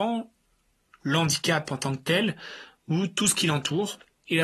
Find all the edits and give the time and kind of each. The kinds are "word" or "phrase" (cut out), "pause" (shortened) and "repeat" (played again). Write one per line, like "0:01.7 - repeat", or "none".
none